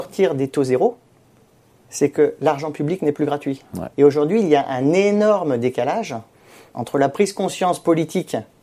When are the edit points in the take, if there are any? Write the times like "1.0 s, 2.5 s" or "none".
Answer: 3.9 s